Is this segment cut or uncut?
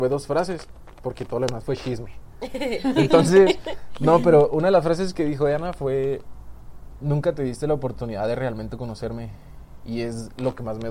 uncut